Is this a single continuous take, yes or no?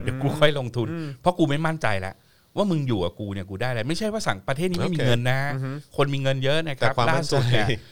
yes